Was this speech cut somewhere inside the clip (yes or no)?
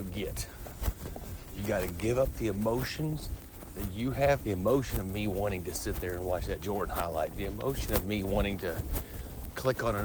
yes